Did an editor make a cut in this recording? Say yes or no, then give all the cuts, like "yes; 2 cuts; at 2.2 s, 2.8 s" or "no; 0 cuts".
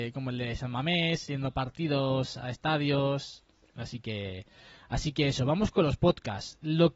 no; 0 cuts